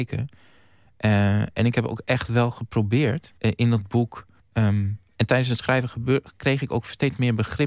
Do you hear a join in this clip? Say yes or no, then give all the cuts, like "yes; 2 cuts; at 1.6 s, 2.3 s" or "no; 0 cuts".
yes; 2 cuts; at 3.4 s, 4.4 s